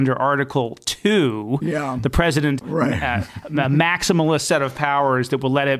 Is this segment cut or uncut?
cut